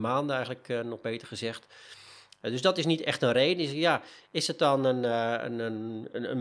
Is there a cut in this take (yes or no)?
no